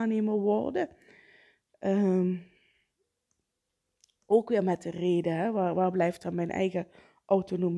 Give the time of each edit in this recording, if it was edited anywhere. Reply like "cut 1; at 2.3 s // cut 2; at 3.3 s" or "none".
none